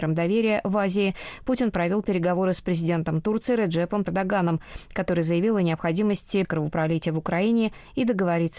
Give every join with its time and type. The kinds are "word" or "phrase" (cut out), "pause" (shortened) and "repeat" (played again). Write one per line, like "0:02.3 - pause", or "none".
0:04.1 - word
0:06.4 - word